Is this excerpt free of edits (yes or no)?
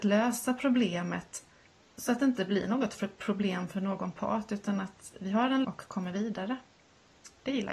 no